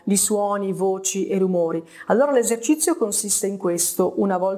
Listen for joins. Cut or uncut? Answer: uncut